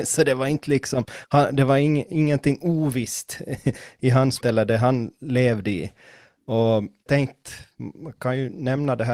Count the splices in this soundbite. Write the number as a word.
two